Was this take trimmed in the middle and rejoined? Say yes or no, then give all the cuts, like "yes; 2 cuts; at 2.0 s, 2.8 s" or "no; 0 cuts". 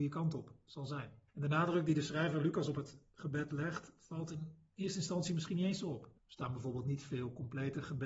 yes; 2 cuts; at 1.3 s, 6.2 s